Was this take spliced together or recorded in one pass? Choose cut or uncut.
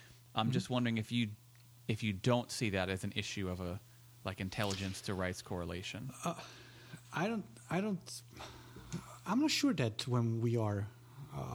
uncut